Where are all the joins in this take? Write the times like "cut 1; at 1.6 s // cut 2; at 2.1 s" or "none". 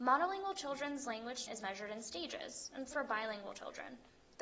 cut 1; at 1.5 s // cut 2; at 2.9 s